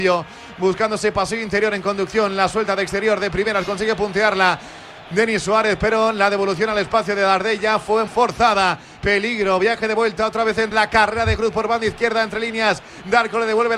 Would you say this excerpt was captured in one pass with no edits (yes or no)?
no